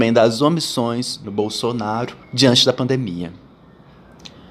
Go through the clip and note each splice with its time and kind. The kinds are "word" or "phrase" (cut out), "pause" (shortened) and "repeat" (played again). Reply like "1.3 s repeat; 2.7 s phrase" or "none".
1.2 s word; 2.2 s pause